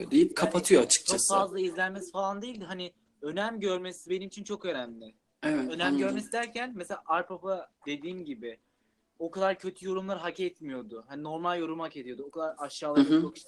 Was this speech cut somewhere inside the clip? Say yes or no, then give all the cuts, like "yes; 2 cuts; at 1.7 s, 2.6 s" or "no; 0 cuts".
no; 0 cuts